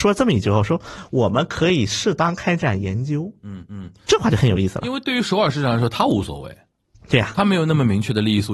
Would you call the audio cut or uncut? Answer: cut